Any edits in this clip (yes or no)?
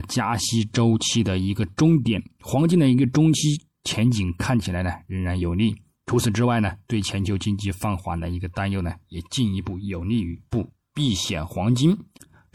no